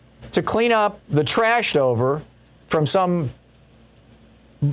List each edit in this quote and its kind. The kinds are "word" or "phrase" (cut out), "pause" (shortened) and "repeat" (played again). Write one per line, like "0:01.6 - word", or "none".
0:01.0 - pause
0:01.7 - word

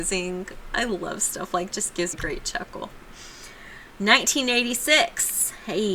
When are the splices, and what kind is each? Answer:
0:01.7 - phrase
0:02.1 - word
0:03.9 - pause

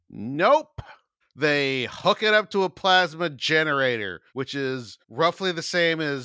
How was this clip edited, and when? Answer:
0:01.2 - pause
0:04.3 - pause
0:05.0 - pause

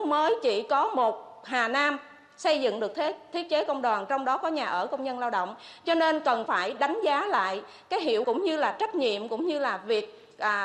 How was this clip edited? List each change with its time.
0:06.5 - word
0:08.2 - word

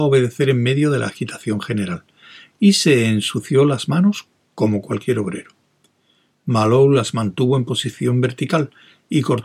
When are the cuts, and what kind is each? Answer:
none

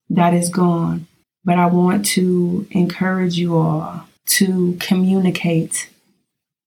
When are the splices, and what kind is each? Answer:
0:01.2 - pause
0:04.2 - pause

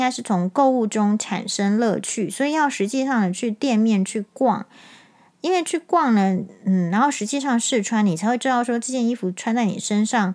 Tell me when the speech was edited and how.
none

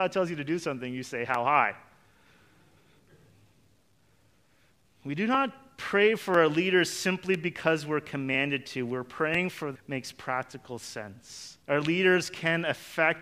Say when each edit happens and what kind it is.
0:09.8 - word
0:11.6 - pause

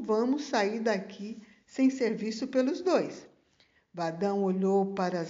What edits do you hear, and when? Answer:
none

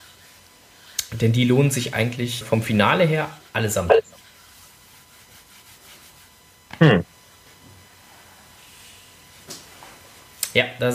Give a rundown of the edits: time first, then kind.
0:02.4 - word
0:03.4 - pause

